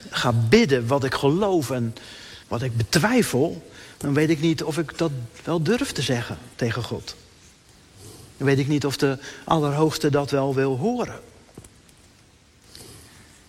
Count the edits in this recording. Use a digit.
1